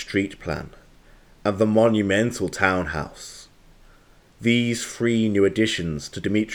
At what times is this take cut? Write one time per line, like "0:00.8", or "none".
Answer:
none